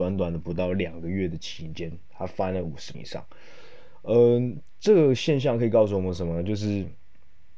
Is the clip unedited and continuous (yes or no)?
no